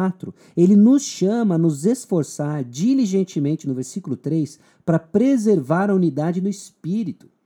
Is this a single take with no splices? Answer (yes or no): yes